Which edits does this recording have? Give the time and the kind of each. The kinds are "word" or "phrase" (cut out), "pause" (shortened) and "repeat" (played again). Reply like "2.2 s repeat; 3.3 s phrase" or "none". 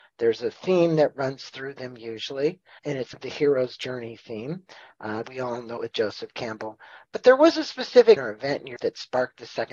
2.8 s word; 3.1 s word; 5.2 s word; 5.8 s word; 8.2 s word; 8.8 s word